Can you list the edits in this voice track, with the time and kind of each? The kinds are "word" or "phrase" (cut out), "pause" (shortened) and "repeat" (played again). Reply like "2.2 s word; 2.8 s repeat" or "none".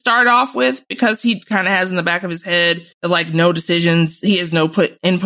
2.9 s pause

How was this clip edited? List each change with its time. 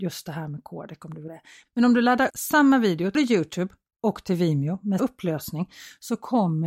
1.3 s word; 2.3 s word; 3.1 s word; 5.0 s word

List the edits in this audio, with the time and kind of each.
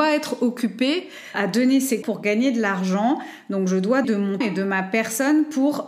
1.3 s word; 2.0 s word; 4.0 s word; 4.4 s word

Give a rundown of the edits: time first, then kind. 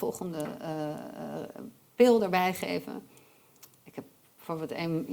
none

